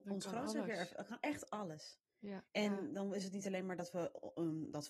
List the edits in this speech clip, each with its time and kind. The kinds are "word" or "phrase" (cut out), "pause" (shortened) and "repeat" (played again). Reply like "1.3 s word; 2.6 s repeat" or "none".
2.5 s pause